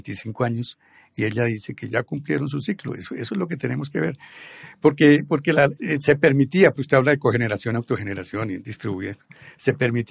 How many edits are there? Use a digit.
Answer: 3